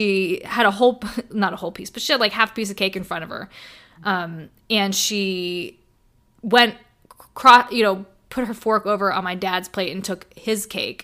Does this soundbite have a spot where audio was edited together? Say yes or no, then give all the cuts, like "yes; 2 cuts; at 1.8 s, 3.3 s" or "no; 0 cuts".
no; 0 cuts